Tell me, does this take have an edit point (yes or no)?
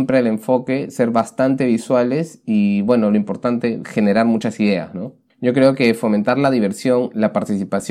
no